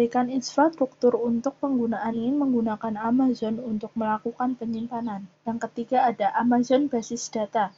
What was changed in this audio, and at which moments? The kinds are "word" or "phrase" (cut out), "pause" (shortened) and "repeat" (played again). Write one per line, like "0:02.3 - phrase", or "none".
0:02.1 - word
0:05.3 - pause